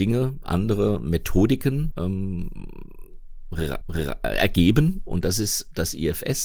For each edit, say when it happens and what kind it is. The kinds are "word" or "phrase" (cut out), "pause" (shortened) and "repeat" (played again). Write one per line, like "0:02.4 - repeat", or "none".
0:01.9 - word
0:03.8 - repeat